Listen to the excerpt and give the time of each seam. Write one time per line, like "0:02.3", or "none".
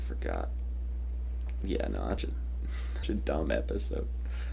0:02.2
0:03.0